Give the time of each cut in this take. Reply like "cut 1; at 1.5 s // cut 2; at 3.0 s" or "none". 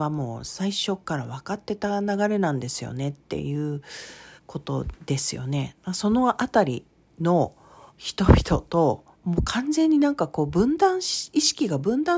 cut 1; at 4.4 s // cut 2; at 7.9 s // cut 3; at 9.1 s